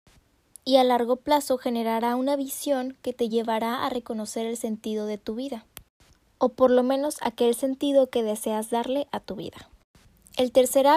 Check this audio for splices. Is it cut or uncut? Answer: uncut